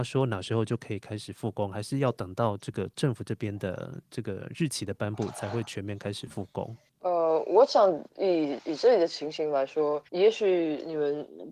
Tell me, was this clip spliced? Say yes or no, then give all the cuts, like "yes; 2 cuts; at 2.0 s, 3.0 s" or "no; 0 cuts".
yes; 2 cuts; at 8.1 s, 10.1 s